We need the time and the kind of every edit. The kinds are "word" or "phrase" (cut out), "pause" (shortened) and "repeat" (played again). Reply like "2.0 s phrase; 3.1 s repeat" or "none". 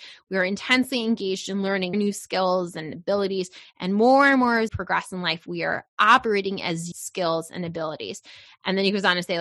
1.9 s word; 4.7 s word; 6.9 s phrase